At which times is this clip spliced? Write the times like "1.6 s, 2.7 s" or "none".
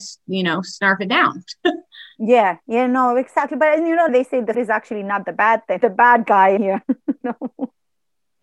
4.1 s, 4.5 s, 5.8 s, 6.6 s, 7.2 s